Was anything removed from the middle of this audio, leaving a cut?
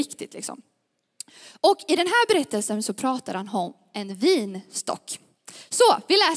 no; 0 cuts

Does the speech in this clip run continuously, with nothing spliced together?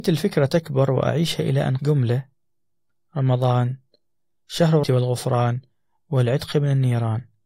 no; 2 cuts; at 1.8 s, 4.8 s

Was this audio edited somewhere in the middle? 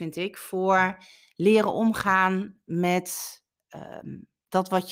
no; 0 cuts

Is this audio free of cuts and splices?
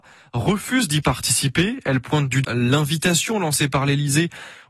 no; 1 cut; at 2.4 s

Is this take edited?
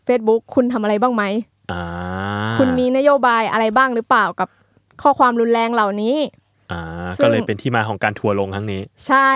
yes; 1 cut; at 4.8 s

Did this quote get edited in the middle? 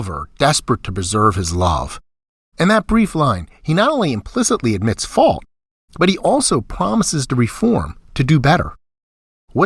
no; 0 cuts

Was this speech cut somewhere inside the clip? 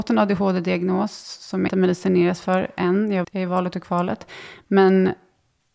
yes; 2 cuts; at 1.7 s, 3.2 s

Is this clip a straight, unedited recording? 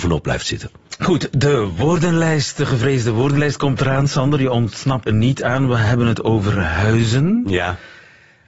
no; 1 cut; at 5.1 s

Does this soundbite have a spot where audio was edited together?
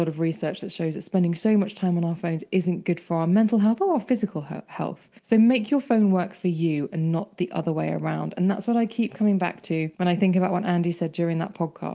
yes; 2 cuts; at 5.2 s, 9.9 s

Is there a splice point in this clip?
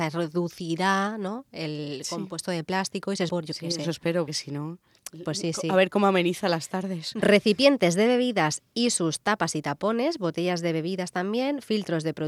yes; 3 cuts; at 3.3 s, 4.3 s, 8.7 s

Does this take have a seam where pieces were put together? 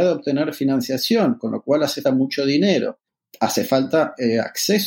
yes; 2 cuts; at 2.0 s, 3.1 s

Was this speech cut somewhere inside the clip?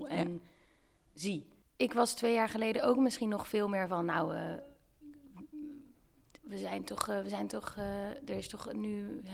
no; 0 cuts

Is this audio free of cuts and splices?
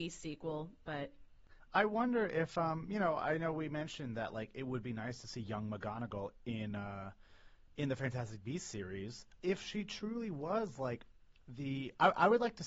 yes; 0 cuts

